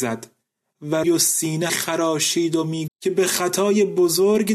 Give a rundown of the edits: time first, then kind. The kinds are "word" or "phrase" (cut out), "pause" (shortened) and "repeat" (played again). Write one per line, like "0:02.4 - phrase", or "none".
0:01.0 - word
0:01.7 - word
0:02.9 - word